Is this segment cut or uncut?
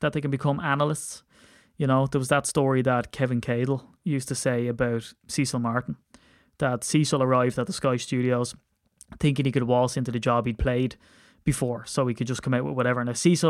uncut